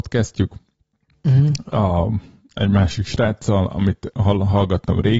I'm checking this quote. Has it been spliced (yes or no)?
no